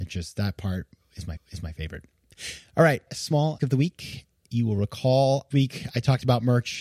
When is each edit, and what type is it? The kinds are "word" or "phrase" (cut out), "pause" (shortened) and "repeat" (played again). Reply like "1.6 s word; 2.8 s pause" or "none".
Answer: 1.4 s repeat; 3.1 s word; 3.6 s word; 5.5 s word